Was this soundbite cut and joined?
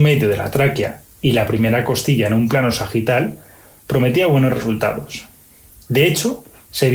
no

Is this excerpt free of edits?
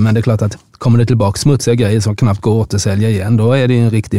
yes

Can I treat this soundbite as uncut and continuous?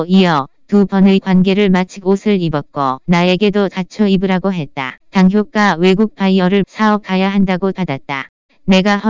no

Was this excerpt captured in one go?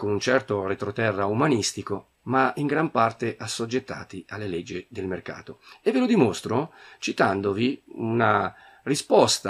yes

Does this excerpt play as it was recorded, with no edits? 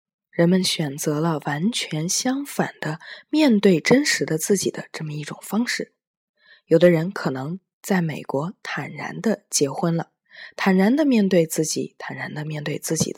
yes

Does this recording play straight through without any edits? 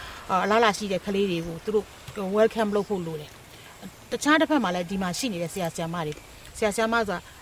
yes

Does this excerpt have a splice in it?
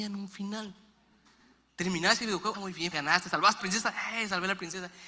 yes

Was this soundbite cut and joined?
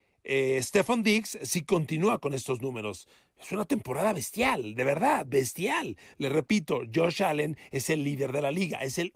no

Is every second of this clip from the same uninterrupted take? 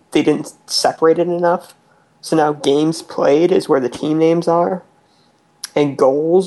yes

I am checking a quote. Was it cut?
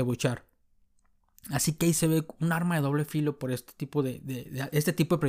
no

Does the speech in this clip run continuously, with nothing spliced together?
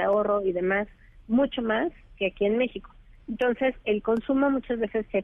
yes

